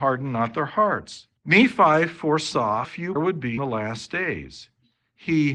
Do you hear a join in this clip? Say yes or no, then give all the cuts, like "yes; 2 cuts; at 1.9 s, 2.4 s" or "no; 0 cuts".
yes; 4 cuts; at 1.4 s, 2.8 s, 3.2 s, 3.6 s